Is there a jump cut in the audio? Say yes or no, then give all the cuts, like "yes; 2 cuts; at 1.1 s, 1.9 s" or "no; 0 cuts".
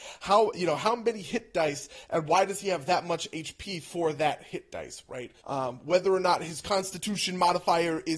yes; 1 cut; at 5.4 s